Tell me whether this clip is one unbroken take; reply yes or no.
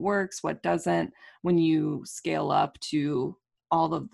yes